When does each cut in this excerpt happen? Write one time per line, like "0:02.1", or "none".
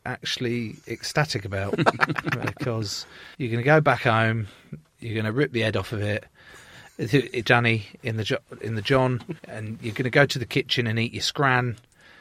0:03.3
0:07.4
0:09.4